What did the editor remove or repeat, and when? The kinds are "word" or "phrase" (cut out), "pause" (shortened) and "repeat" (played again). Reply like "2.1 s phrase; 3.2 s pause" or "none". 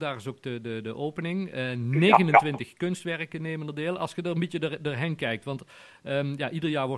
none

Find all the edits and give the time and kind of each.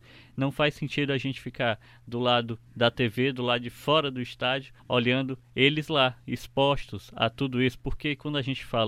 4.8 s pause

